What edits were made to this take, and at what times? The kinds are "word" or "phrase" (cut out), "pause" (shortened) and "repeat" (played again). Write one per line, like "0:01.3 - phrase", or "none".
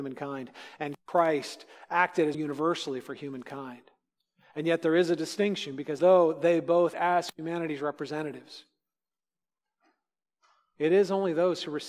0:02.3 - word
0:06.0 - word
0:06.9 - word